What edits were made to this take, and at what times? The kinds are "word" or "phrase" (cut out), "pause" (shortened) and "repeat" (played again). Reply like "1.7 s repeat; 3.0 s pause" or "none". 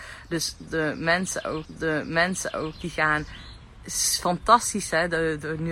1.6 s repeat

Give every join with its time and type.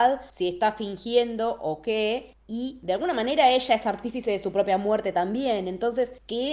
none

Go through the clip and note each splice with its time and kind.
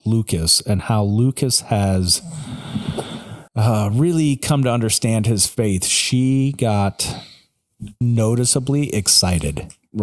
3.5 s pause; 8.0 s word

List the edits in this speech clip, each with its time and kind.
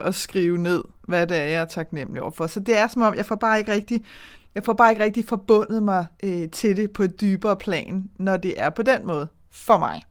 4.3 s pause; 6.1 s pause

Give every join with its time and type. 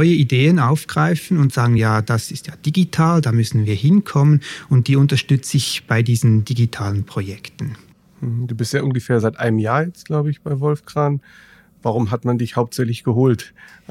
none

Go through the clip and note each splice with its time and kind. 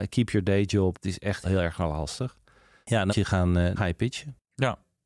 0.9 s word; 1.4 s word; 3.1 s word; 3.8 s word

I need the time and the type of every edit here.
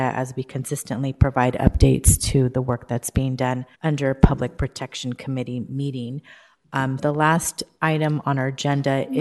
3.7 s pause; 7.0 s word

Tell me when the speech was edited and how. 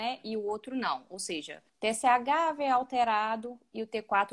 1.7 s pause

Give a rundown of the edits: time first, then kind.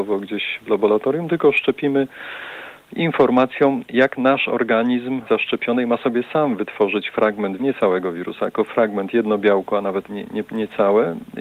5.2 s word; 7.6 s word; 10.1 s word

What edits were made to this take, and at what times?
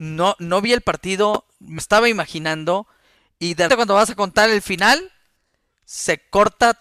1.8 s word; 3.7 s word

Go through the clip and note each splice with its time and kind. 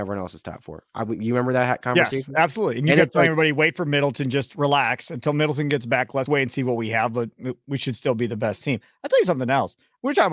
6.3 s word

